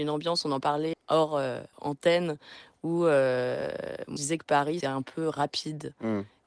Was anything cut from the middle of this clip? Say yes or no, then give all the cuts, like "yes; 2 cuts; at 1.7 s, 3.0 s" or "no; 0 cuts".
yes; 4 cuts; at 0.9 s, 1.7 s, 4.2 s, 4.8 s